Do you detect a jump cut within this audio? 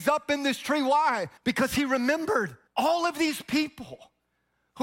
yes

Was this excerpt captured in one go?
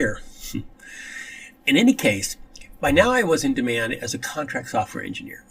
yes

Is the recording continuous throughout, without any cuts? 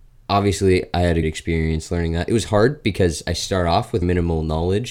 no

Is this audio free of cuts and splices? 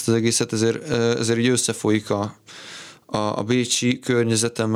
yes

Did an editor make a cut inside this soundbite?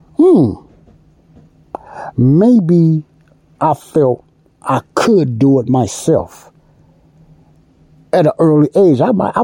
no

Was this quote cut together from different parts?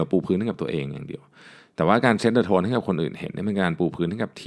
no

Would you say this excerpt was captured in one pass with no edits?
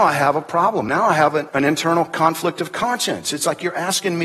yes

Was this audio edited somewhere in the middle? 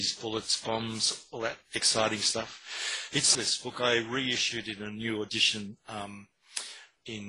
yes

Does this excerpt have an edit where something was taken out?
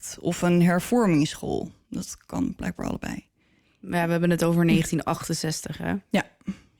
no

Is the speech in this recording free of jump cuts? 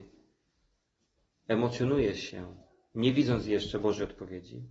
yes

